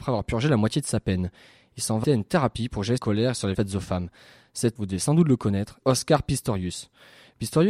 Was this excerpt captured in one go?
no; 5 cuts; at 2.0 s, 3.0 s, 3.5 s, 4.8 s, 5.8 s

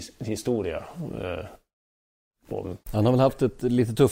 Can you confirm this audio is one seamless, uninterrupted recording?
no; 1 cut; at 2.8 s

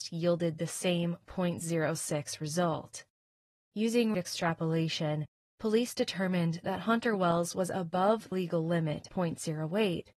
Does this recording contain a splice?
yes; 3 cuts; at 4.1 s, 8.3 s, 9.1 s

